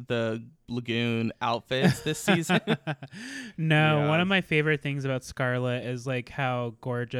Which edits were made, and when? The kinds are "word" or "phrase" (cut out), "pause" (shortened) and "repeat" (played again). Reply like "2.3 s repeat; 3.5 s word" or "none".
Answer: none